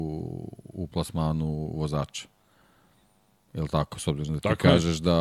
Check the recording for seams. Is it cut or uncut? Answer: uncut